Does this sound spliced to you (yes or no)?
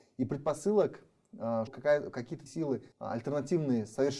yes